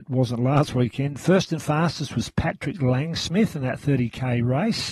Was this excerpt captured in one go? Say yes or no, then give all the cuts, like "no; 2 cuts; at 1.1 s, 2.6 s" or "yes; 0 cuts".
yes; 0 cuts